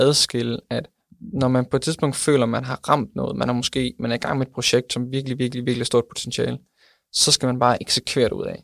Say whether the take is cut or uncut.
uncut